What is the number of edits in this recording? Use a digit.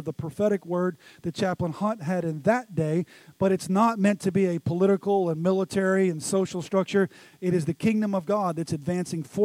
0